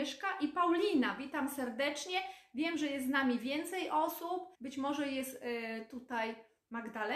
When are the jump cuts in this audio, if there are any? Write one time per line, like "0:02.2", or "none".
0:04.5